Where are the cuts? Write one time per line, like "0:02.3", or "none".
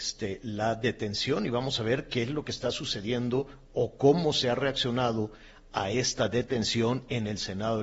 none